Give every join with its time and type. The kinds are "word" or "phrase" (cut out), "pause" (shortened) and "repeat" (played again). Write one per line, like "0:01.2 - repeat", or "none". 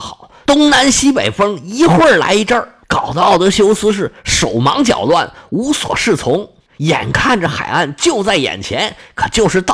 0:02.8 - pause